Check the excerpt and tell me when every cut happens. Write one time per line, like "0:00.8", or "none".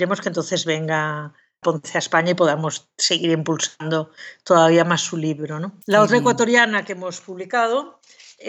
0:01.6
0:05.8